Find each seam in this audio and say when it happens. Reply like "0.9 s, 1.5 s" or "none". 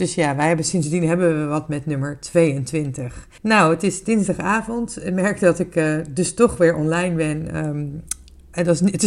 3.4 s